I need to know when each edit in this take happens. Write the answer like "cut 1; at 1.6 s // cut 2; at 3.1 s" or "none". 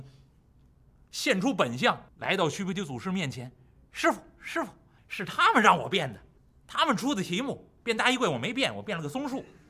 cut 1; at 2.1 s // cut 2; at 5.0 s // cut 3; at 6.4 s // cut 4; at 7.8 s